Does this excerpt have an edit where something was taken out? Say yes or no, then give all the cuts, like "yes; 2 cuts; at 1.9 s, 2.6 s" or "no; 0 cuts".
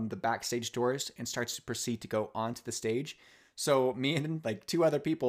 no; 0 cuts